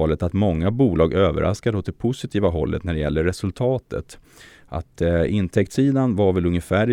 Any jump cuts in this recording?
no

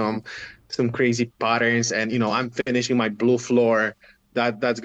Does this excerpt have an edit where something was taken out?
no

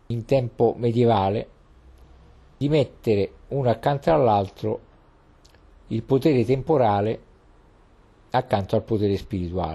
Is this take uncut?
yes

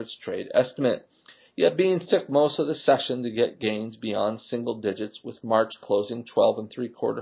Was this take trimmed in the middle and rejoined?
no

